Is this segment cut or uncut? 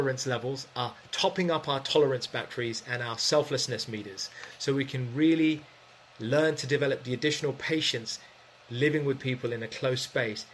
uncut